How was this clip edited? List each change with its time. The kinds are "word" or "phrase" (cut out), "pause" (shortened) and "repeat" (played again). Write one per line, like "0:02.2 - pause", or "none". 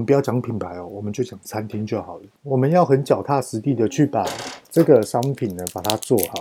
0:02.4 - pause
0:04.6 - pause